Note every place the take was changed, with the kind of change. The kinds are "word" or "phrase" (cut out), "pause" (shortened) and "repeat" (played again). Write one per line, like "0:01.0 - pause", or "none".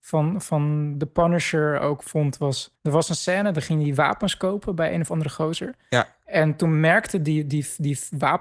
0:02.7 - pause